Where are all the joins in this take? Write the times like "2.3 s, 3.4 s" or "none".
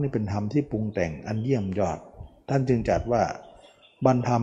none

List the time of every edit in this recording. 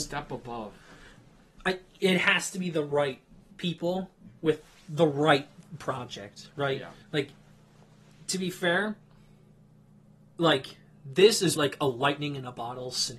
7.0 s, 11.6 s

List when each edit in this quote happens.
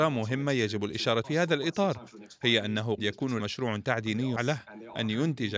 1.2 s, 3.0 s, 3.4 s, 4.4 s

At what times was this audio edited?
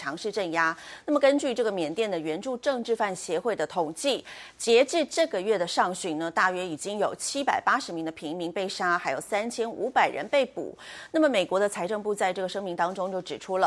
none

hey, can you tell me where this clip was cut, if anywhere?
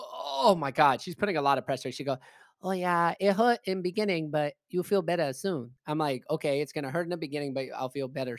none

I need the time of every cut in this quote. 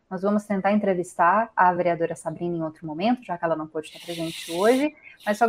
none

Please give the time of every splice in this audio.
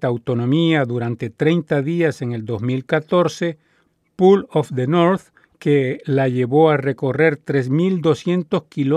none

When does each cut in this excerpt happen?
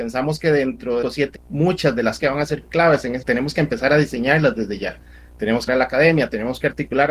1.0 s, 1.3 s, 2.2 s, 3.2 s, 5.7 s

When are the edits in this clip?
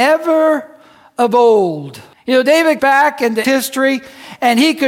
2.1 s, 2.8 s, 3.4 s

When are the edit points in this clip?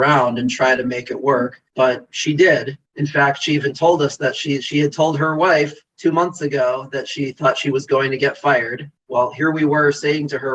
1.7 s, 2.9 s, 5.9 s, 9.0 s

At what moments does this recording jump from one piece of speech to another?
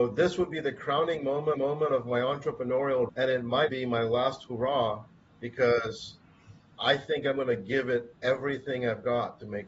1.5 s, 3.1 s, 3.7 s

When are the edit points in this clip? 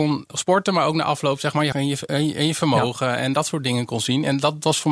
1.7 s

